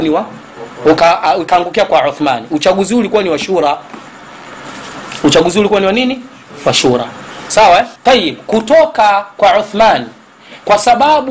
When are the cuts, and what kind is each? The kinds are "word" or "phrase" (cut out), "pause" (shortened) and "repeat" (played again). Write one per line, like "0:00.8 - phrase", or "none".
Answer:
0:08.0 - pause